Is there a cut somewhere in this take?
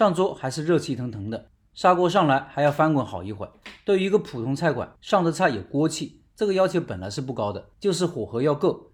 yes; 2 cuts; at 5.0 s, 7.7 s

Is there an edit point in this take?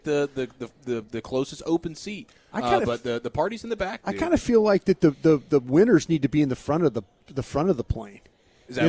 no; 0 cuts

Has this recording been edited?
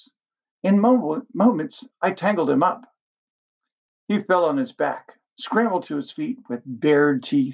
no; 0 cuts

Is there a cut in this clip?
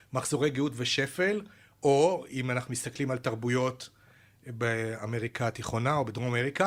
no; 0 cuts

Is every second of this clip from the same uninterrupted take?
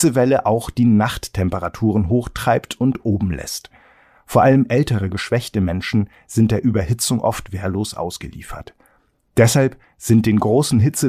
yes; 0 cuts

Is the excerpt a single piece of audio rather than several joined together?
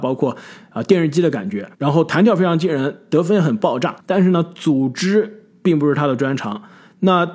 no; 2 cuts; at 1.7 s, 4.0 s

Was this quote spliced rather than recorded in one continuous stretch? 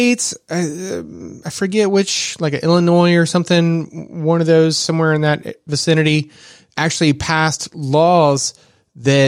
no; 0 cuts

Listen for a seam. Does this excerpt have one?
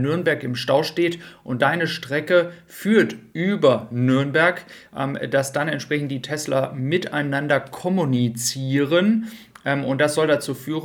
no; 0 cuts

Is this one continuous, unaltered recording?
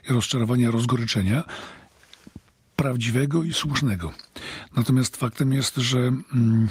yes; 0 cuts

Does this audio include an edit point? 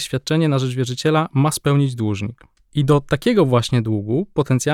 no; 0 cuts

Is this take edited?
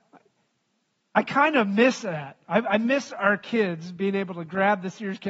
no; 0 cuts

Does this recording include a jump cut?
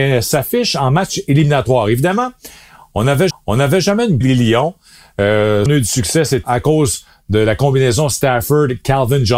yes; 4 cuts; at 3.3 s, 4.2 s, 5.7 s, 6.4 s

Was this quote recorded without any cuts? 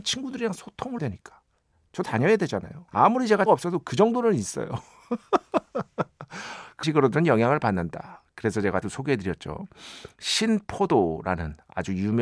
no; 6 cuts; at 1.0 s, 2.0 s, 2.9 s, 3.5 s, 6.8 s, 8.8 s

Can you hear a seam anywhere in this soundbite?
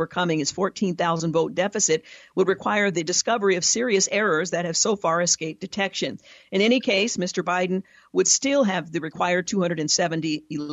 no; 0 cuts

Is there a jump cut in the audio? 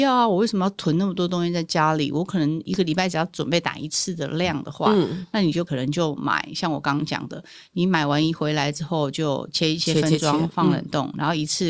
no; 0 cuts

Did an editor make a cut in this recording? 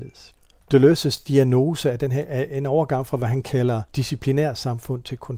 yes; 1 cut; at 3.9 s

